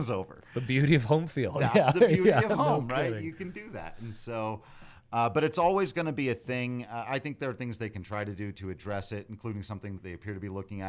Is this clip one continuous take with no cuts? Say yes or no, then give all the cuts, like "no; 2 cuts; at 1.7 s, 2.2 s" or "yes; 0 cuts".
no; 1 cut; at 10.0 s